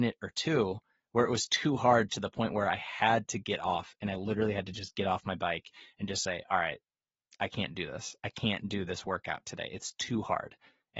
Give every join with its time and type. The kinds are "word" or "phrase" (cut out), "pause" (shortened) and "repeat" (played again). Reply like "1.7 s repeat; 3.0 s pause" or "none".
none